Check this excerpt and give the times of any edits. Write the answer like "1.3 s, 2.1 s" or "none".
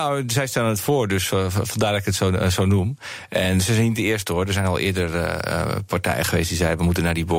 none